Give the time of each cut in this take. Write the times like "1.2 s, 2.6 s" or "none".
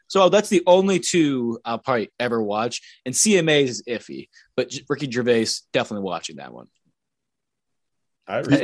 none